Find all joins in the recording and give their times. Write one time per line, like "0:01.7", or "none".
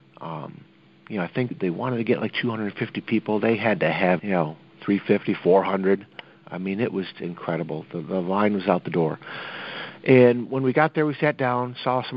0:01.5
0:04.2
0:07.1

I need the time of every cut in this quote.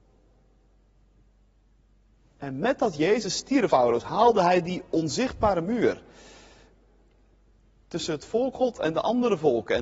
0:03.7
0:08.5

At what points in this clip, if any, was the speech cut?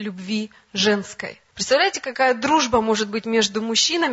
0:01.5

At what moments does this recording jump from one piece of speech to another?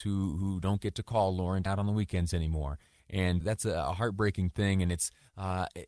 0:01.7
0:03.4

